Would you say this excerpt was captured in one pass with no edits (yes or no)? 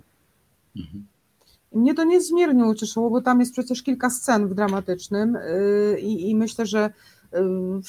yes